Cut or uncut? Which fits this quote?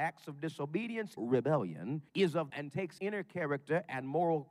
cut